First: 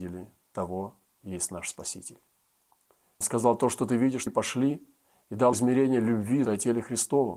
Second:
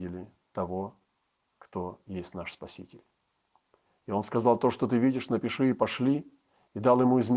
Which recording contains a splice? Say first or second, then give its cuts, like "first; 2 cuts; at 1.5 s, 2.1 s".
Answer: first; 5 cuts; at 1.2 s, 3.2 s, 4.3 s, 5.5 s, 6.4 s